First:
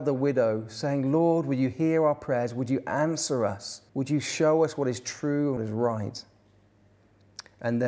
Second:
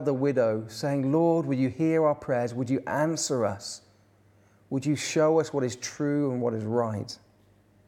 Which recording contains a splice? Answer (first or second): first